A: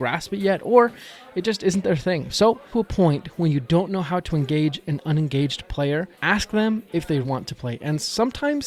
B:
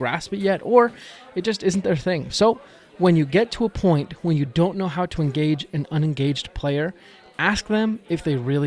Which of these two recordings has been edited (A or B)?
A